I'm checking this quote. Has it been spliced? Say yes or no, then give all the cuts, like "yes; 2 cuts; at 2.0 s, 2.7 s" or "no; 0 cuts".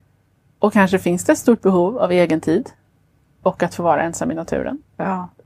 yes; 1 cut; at 2.9 s